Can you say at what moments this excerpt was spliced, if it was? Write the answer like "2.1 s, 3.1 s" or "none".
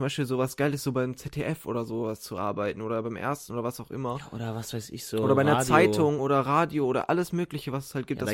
none